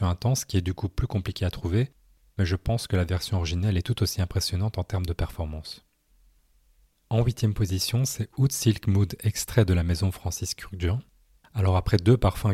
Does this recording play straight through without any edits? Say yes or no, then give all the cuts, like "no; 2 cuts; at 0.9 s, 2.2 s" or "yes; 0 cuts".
yes; 0 cuts